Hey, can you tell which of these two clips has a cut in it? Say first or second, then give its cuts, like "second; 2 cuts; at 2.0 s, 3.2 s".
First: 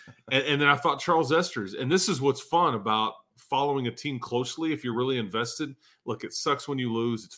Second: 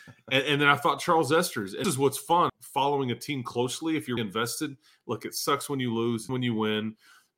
second; 4 cuts; at 1.8 s, 2.5 s, 4.2 s, 6.3 s